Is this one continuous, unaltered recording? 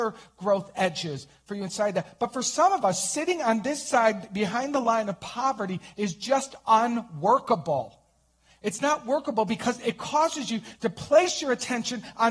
yes; 0 cuts

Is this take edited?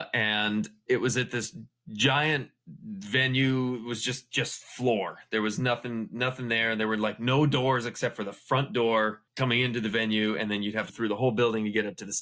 yes; 2 cuts; at 9.3 s, 10.9 s

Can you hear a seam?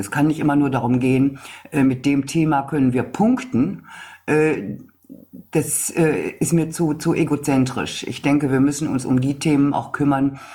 no; 0 cuts

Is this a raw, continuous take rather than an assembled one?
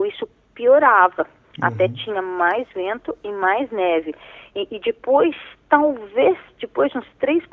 yes; 0 cuts

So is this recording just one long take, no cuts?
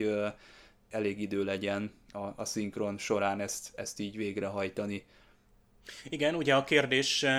yes; 0 cuts

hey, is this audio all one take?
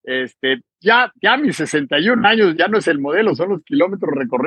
no; 1 cut; at 2.5 s

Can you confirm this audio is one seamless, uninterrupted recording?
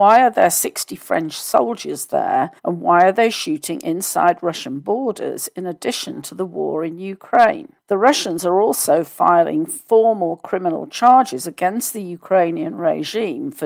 no; 2 cuts; at 2.6 s, 7.8 s

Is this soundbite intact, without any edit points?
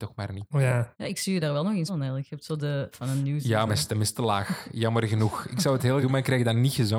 no; 5 cuts; at 0.9 s, 1.9 s, 2.9 s, 3.7 s, 6.0 s

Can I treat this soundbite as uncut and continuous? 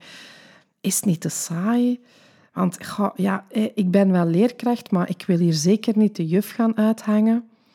yes; 0 cuts

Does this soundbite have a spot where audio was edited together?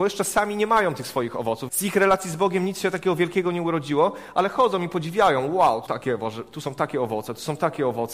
yes; 2 cuts; at 1.7 s, 5.9 s

